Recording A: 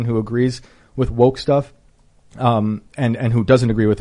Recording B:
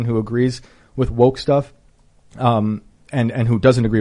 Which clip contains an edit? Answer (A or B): A